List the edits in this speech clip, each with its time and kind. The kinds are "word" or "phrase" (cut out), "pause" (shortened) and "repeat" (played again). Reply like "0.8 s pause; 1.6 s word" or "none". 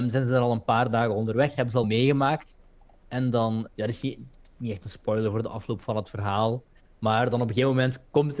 1.8 s word; 3.7 s word